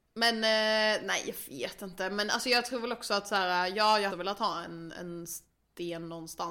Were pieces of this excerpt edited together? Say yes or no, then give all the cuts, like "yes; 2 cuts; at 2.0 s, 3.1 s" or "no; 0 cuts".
yes; 1 cut; at 4.1 s